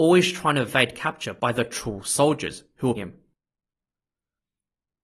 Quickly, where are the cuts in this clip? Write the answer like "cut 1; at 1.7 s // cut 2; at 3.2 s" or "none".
cut 1; at 3.0 s